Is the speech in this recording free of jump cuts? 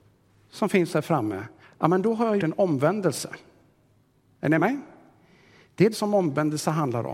no; 4 cuts; at 1.6 s, 2.4 s, 4.6 s, 5.9 s

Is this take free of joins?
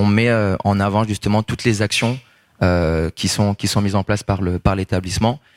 yes; 0 cuts

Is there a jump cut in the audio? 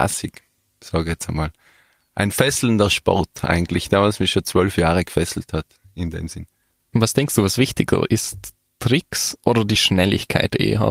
no; 0 cuts

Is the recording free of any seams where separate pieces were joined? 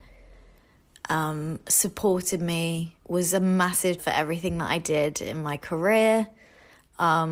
no; 2 cuts; at 3.0 s, 4.0 s

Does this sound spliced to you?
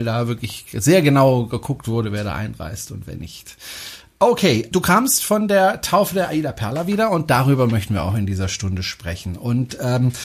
yes; 1 cut; at 4.7 s

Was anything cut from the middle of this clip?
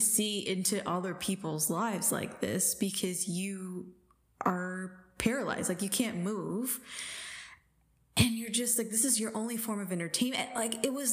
no; 0 cuts

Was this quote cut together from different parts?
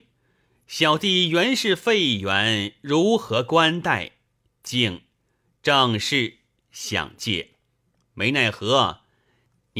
no; 0 cuts

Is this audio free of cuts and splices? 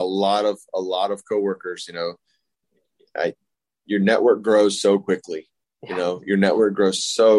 yes; 0 cuts

